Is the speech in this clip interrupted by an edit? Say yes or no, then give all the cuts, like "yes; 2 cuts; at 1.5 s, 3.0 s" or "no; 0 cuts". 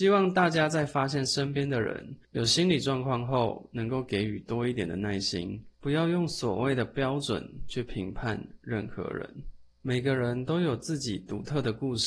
yes; 3 cuts; at 2.2 s, 5.7 s, 9.7 s